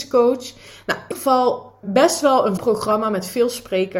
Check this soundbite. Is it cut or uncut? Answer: cut